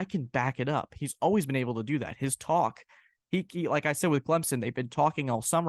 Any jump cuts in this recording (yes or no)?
no